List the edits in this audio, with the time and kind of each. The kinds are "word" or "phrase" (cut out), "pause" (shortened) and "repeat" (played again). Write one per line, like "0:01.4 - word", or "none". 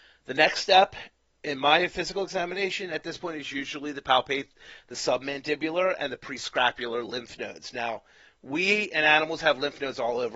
none